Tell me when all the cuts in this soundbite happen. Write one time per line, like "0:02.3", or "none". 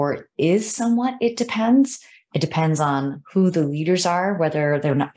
none